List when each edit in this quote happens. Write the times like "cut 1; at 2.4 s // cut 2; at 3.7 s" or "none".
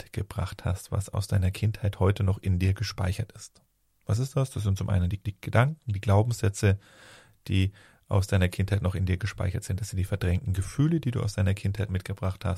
cut 1; at 5.3 s